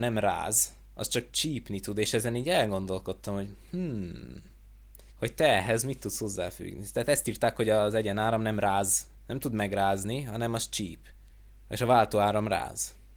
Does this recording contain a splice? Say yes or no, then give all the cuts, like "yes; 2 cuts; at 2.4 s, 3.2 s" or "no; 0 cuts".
yes; 3 cuts; at 5.1 s, 9.2 s, 11.3 s